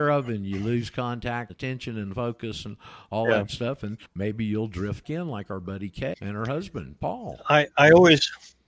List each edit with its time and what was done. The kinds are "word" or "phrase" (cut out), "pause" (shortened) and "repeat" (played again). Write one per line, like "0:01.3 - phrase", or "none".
0:01.5 - word
0:04.1 - pause
0:05.0 - word
0:06.1 - word